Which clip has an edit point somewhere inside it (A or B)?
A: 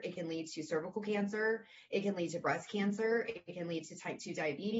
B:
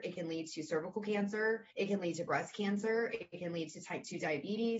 B